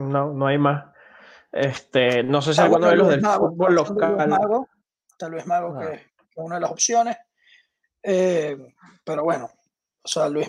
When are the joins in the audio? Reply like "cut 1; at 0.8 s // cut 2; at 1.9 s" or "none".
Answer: none